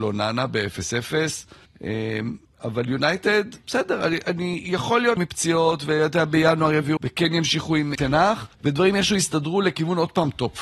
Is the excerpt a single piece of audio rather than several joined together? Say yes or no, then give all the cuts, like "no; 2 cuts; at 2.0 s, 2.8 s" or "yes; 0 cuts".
no; 5 cuts; at 1.7 s, 5.2 s, 7.0 s, 7.9 s, 8.5 s